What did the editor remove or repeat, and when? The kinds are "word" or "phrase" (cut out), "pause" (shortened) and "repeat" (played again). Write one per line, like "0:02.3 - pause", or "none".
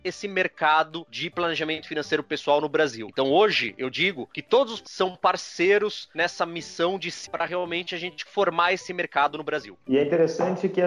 0:04.8 - word
0:07.2 - word
0:08.3 - word